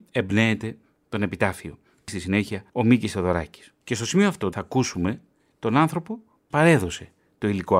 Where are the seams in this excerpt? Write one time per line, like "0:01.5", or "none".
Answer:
0:02.1
0:02.7
0:03.8
0:04.5
0:06.5